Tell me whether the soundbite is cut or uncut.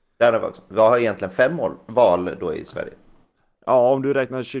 uncut